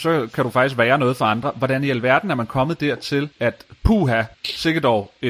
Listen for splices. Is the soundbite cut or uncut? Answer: cut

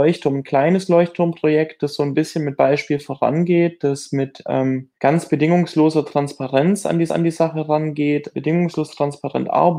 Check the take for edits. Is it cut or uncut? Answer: cut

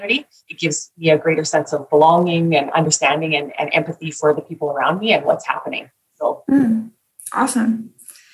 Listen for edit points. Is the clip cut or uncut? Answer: uncut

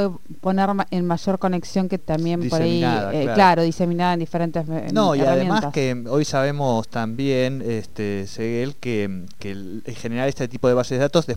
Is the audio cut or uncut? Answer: cut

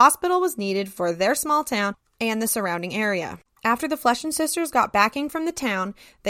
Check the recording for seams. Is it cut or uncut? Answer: uncut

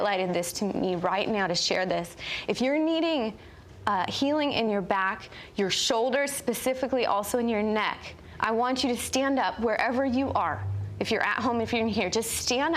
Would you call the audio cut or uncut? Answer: uncut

